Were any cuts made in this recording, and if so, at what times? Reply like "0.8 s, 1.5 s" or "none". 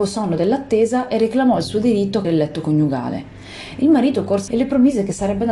2.2 s, 4.5 s